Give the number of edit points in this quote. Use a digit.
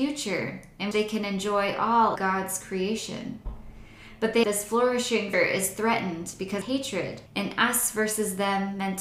6